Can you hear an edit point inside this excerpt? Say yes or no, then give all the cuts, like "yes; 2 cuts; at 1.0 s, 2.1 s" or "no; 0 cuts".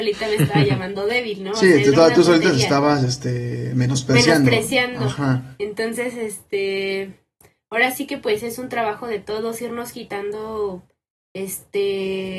no; 0 cuts